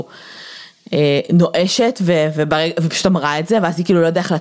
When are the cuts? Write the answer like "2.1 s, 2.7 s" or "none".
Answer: none